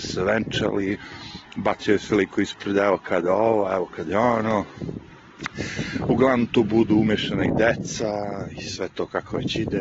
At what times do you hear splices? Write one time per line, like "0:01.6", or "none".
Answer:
none